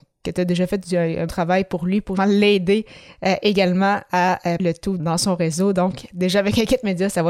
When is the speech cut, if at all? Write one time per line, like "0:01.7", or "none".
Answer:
0:01.3
0:02.2
0:04.6
0:05.0